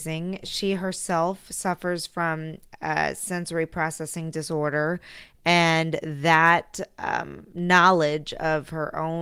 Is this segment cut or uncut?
uncut